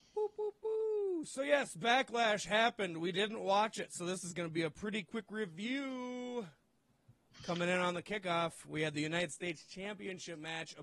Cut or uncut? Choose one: uncut